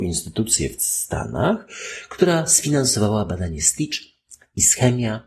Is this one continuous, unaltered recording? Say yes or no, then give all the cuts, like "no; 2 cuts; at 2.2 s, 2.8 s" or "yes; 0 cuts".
yes; 0 cuts